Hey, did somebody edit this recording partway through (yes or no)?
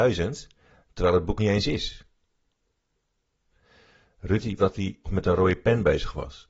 yes